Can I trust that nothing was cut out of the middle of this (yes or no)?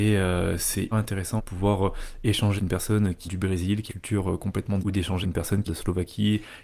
no